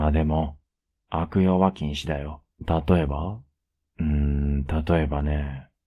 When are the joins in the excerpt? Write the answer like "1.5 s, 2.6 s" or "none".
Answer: 2.5 s, 3.8 s